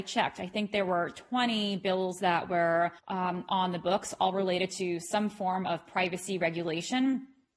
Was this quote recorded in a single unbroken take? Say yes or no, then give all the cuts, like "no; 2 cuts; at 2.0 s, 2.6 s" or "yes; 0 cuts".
no; 1 cut; at 3.0 s